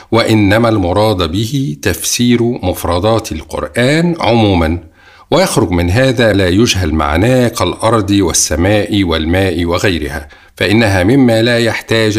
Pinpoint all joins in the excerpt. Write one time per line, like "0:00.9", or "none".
0:06.3

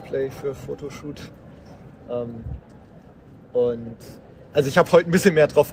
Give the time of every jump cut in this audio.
none

